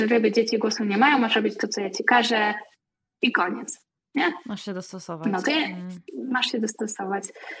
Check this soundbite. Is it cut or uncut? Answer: uncut